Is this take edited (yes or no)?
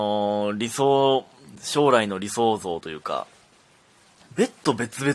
no